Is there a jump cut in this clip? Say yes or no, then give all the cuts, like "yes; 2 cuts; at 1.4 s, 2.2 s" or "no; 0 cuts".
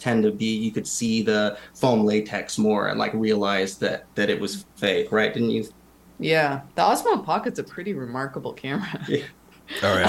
yes; 2 cuts; at 4.1 s, 6.7 s